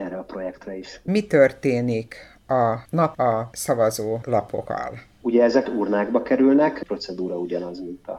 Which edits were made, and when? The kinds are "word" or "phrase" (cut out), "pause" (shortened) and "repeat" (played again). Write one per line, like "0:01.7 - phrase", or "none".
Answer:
0:03.1 - word
0:05.6 - phrase